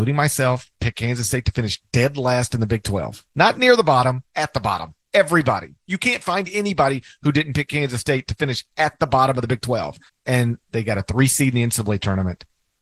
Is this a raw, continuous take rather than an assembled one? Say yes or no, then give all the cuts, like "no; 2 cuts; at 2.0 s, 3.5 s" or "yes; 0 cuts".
no; 2 cuts; at 4.3 s, 10.1 s